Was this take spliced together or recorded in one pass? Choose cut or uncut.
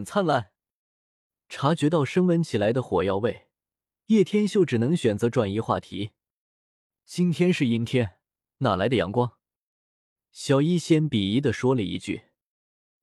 uncut